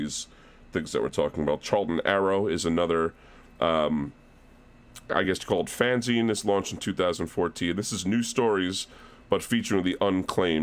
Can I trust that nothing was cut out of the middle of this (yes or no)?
yes